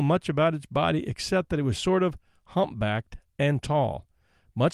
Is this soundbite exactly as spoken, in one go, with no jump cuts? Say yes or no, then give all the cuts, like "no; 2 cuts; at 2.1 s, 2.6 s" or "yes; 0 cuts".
yes; 0 cuts